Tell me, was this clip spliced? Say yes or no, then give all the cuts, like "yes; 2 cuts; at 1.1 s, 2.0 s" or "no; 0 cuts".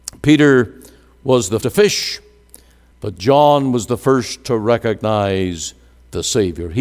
yes; 1 cut; at 1.6 s